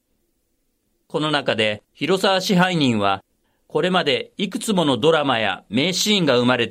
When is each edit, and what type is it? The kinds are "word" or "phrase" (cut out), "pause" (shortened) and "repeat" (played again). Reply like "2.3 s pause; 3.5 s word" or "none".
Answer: none